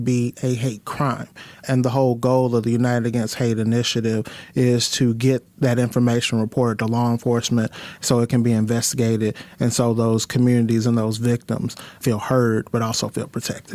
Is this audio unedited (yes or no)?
yes